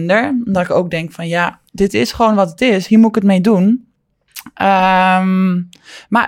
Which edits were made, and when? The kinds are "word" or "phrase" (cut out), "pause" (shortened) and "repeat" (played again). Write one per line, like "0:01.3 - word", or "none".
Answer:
0:01.7 - pause